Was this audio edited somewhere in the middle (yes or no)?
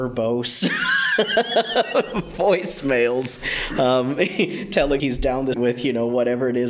yes